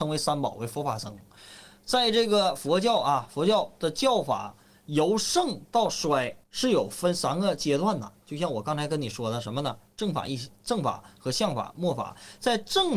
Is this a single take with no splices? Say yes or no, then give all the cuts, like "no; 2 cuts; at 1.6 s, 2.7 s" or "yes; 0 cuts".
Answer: no; 1 cut; at 6.4 s